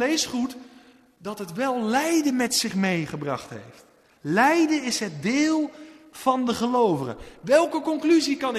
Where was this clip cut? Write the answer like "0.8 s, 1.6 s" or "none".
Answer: none